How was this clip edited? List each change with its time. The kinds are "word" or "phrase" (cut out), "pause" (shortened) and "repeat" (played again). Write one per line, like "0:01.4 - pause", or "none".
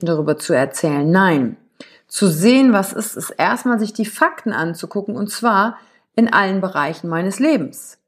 none